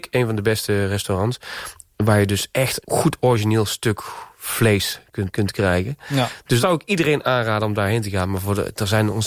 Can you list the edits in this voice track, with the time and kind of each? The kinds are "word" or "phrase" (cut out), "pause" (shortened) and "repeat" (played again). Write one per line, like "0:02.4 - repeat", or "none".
0:02.8 - word
0:05.3 - word
0:06.6 - word